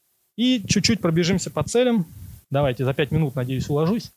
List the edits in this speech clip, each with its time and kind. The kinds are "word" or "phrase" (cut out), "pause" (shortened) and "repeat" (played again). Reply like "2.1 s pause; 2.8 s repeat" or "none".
2.4 s pause